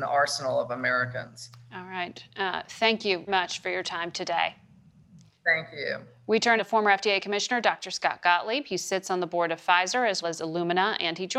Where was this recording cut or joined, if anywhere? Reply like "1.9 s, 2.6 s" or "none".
3.3 s, 6.6 s, 10.2 s